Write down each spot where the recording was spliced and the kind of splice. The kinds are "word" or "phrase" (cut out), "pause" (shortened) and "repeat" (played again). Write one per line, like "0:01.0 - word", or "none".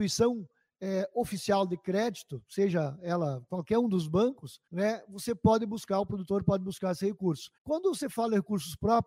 0:04.7 - pause
0:07.6 - pause